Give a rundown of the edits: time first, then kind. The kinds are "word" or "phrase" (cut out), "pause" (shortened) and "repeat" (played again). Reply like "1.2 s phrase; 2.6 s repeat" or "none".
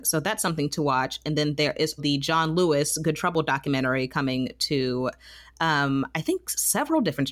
2.0 s word